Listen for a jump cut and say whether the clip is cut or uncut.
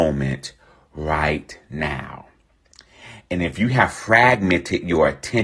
uncut